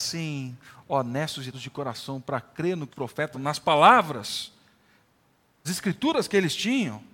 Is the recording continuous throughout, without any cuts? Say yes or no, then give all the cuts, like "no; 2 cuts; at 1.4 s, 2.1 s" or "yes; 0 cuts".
no; 4 cuts; at 1.5 s, 2.9 s, 3.3 s, 5.6 s